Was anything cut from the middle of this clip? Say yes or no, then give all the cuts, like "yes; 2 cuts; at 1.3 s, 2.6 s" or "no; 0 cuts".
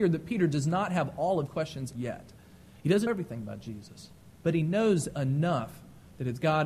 yes; 4 cuts; at 1.5 s, 1.9 s, 3.1 s, 4.3 s